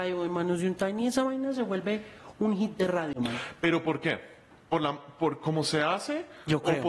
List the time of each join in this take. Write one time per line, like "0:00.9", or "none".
none